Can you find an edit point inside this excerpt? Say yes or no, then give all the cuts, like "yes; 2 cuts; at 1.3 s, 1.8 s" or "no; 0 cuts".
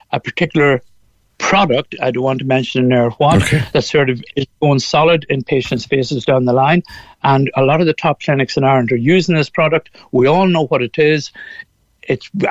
no; 0 cuts